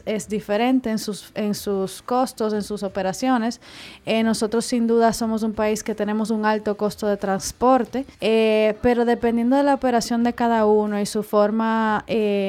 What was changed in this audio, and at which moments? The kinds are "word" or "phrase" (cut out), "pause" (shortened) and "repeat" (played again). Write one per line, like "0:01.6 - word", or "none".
0:08.1 - pause